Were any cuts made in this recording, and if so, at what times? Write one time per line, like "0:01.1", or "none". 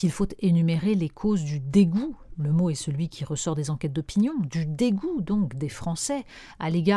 none